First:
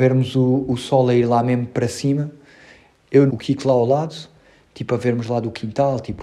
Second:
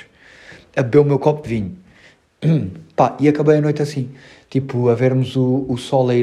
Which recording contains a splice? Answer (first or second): first